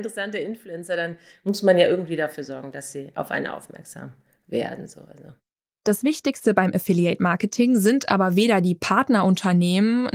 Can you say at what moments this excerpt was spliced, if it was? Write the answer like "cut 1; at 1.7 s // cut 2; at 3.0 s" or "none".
none